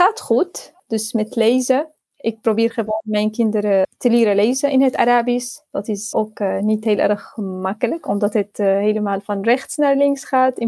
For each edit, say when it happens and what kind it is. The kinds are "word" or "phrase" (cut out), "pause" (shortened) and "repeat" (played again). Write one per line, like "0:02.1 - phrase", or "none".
0:06.1 - word